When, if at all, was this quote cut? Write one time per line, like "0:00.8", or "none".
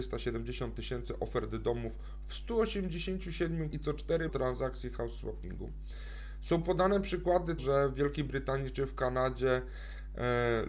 0:03.7
0:04.3
0:07.6